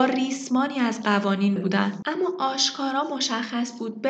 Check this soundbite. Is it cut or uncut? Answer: cut